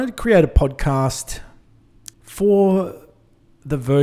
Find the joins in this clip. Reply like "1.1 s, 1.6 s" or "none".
2.1 s